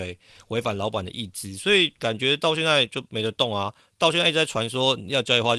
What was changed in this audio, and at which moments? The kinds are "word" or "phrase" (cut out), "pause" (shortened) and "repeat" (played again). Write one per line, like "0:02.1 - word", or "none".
none